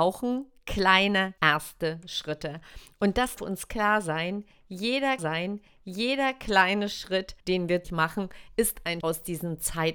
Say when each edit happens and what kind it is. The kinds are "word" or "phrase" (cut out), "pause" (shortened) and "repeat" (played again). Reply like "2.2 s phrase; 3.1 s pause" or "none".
1.4 s pause; 3.4 s word; 5.2 s repeat; 7.4 s pause; 7.8 s word; 9.0 s word